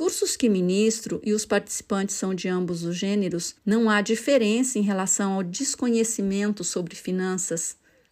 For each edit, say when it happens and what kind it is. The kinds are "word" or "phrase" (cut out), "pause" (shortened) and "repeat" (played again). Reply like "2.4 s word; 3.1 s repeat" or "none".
3.6 s pause

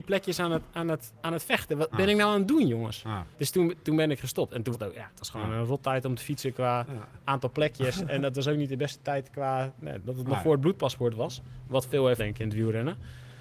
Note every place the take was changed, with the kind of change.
1.9 s word; 3.3 s pause; 4.7 s word; 12.2 s word

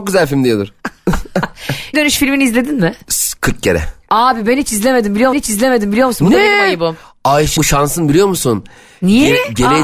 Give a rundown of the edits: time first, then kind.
1.9 s word; 5.3 s repeat; 7.6 s phrase

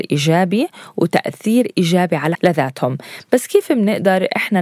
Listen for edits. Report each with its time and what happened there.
2.3 s word

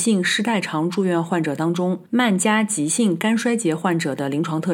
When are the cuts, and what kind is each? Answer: 2.1 s pause

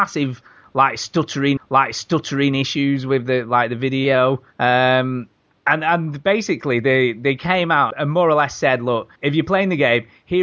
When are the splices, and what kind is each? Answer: 1.6 s repeat; 4.5 s pause; 7.9 s word; 9.2 s pause

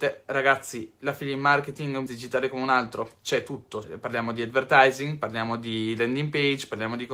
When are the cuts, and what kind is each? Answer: 2.1 s word; 3.8 s word

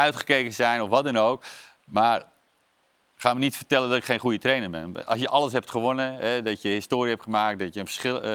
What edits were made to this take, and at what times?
none

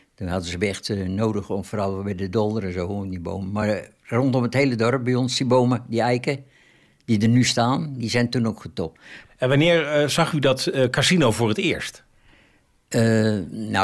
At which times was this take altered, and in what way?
none

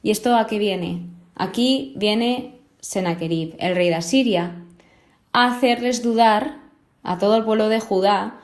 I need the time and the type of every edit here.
none

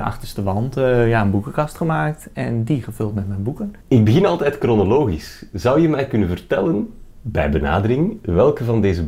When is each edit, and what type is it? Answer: 3.8 s pause; 7.1 s pause

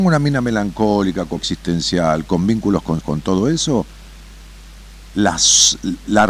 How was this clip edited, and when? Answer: 1.4 s word; 3.0 s word

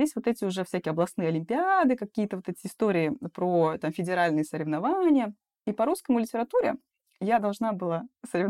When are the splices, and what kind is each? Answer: none

